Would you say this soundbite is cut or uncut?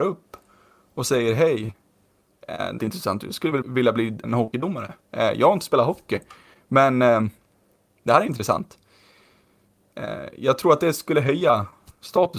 cut